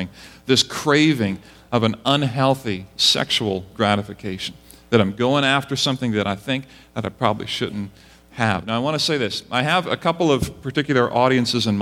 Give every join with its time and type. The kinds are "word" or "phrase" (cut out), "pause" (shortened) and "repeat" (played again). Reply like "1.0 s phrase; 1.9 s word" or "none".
none